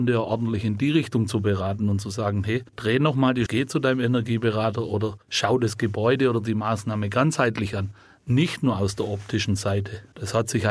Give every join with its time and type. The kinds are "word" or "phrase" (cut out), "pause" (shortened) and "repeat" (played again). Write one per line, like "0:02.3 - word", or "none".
0:02.7 - pause
0:03.5 - word
0:05.2 - pause